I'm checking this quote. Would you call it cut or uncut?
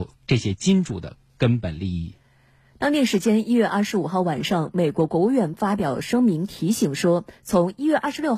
uncut